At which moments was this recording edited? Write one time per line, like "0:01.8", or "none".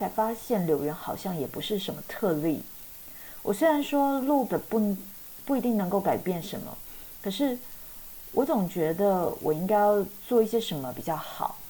0:04.5